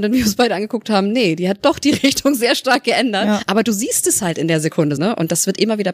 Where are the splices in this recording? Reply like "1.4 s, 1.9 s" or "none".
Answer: 5.0 s